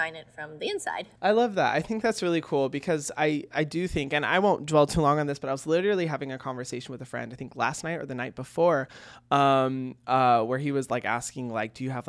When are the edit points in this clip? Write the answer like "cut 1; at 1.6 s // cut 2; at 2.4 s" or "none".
cut 1; at 1.2 s